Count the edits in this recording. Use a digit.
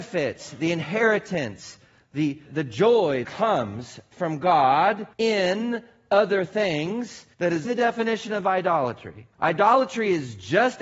6